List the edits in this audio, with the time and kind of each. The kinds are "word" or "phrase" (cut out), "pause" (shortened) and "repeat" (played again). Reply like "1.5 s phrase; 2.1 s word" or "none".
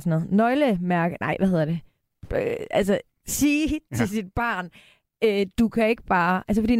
none